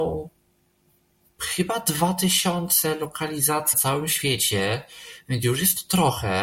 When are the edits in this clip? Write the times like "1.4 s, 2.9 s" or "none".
3.7 s